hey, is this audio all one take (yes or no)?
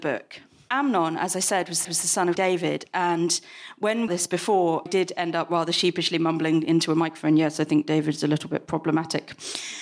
no